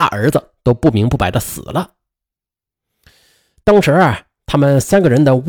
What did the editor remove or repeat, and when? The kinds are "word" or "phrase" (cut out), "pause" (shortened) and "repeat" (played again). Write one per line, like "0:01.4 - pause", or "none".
none